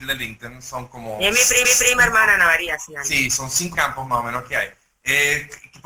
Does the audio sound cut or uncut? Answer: cut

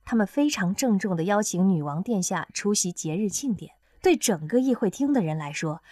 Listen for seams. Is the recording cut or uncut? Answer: cut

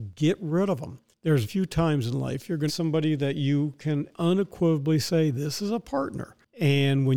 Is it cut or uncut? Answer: cut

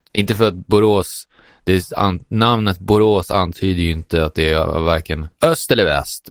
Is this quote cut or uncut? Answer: uncut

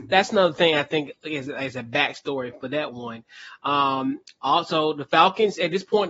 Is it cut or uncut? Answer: uncut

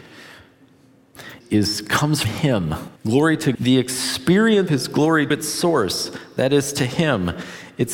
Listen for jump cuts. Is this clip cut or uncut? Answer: cut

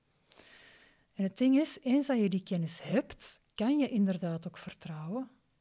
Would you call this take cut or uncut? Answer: uncut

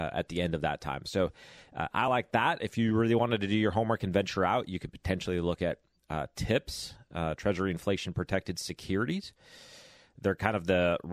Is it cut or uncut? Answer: uncut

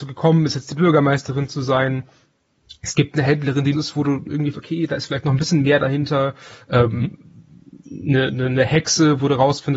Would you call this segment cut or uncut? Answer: cut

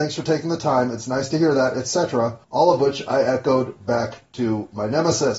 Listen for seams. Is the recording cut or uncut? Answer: cut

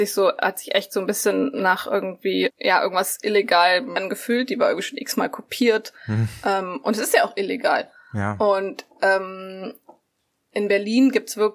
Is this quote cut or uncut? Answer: cut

